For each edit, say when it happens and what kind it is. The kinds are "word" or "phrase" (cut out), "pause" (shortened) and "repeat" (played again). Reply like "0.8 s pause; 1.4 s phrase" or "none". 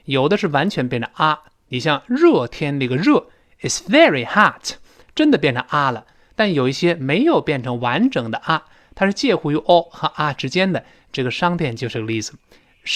none